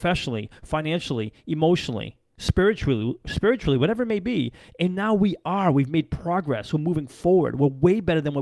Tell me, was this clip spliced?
no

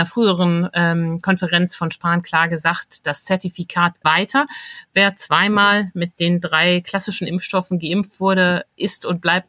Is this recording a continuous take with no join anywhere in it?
no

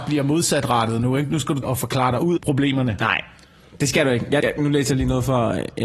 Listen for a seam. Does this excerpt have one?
yes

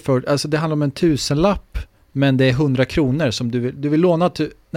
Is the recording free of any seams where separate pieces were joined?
yes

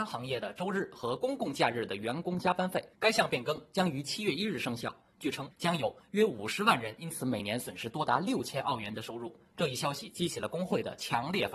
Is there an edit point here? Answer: yes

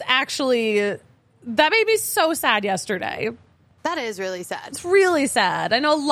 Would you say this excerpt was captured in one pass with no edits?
yes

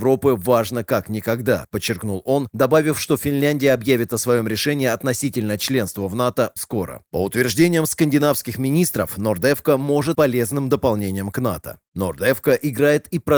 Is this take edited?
yes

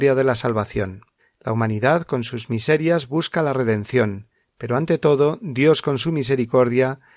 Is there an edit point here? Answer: yes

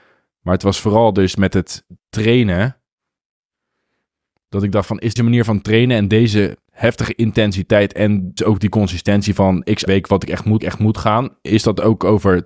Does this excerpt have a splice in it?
yes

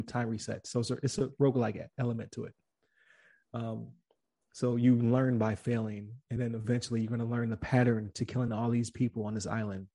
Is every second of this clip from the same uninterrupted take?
yes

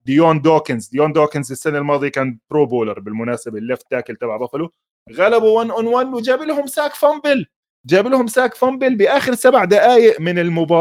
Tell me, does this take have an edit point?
no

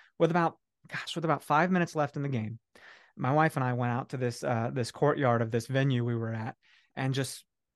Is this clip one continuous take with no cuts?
yes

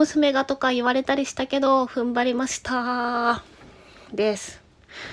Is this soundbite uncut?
yes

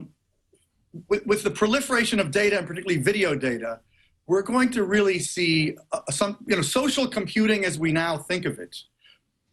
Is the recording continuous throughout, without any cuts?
yes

